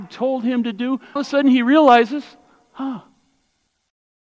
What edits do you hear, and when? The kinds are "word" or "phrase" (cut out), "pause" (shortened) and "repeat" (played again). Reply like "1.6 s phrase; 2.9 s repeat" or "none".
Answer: 1.2 s word